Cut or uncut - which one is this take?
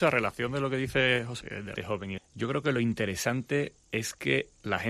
cut